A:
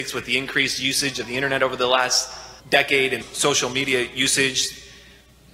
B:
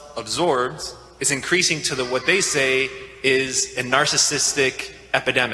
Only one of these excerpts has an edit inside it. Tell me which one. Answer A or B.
A